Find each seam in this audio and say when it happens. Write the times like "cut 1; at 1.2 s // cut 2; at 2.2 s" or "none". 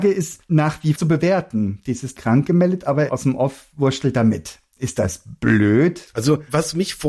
cut 1; at 1.0 s // cut 2; at 2.2 s // cut 3; at 3.1 s